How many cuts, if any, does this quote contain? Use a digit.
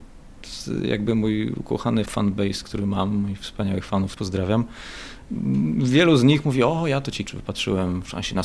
3